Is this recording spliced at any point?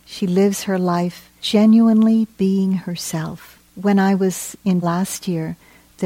yes; 3 cuts; at 1.4 s, 3.7 s, 4.8 s

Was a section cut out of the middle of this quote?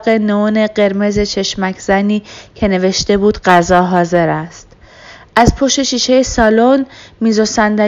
no; 0 cuts

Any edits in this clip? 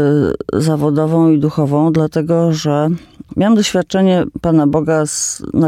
no; 0 cuts

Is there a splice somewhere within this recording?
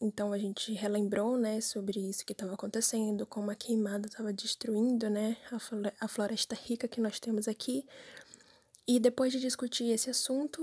no; 0 cuts

